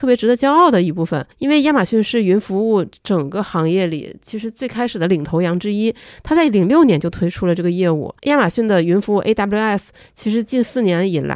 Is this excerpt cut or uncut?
cut